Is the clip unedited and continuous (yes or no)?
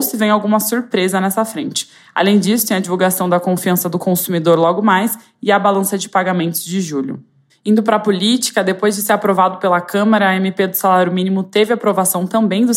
yes